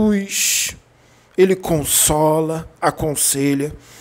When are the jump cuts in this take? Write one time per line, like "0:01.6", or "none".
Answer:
0:02.7